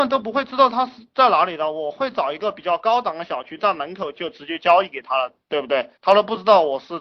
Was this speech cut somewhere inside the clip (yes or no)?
yes